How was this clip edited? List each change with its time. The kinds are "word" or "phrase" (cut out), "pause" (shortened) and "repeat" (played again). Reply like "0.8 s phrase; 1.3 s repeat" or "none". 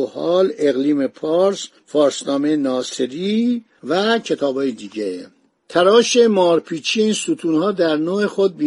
none